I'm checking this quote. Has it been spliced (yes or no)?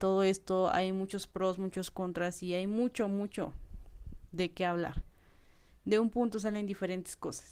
no